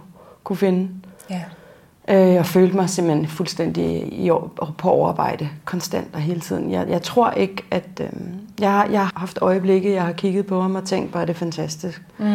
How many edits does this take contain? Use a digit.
4